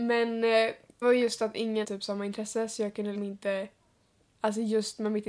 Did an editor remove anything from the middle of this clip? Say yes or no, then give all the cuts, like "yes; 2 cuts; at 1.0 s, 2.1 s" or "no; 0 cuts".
yes; 3 cuts; at 1.0 s, 1.8 s, 3.1 s